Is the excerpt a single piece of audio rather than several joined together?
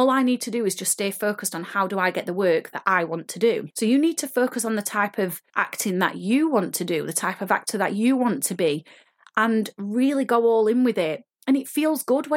yes; 0 cuts

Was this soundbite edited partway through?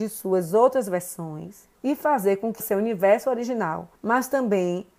yes; 3 cuts; at 1.8 s, 2.6 s, 4.0 s

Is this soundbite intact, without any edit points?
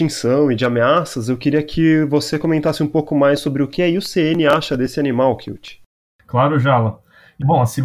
yes; 0 cuts

